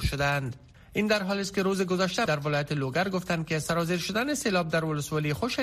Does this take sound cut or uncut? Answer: cut